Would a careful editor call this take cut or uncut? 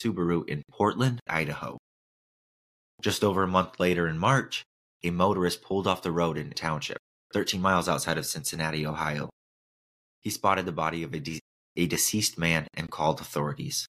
cut